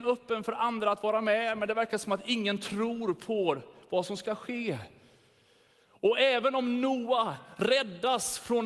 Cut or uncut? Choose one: uncut